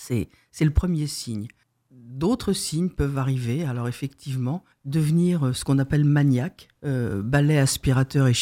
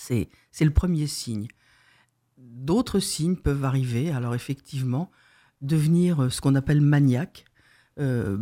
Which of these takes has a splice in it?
first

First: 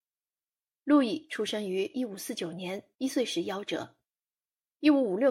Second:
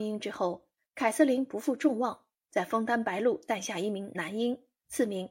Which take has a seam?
first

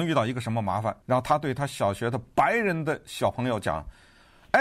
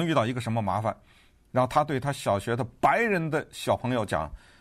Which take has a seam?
first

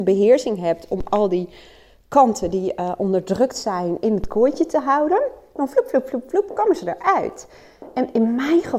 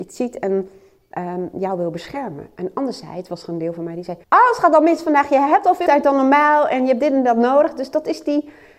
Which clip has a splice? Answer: second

